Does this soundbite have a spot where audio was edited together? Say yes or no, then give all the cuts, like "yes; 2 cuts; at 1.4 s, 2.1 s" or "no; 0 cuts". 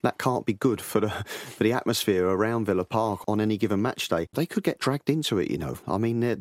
no; 0 cuts